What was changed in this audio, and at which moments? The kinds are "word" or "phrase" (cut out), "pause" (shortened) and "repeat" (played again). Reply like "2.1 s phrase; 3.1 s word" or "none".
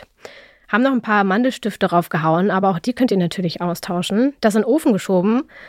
none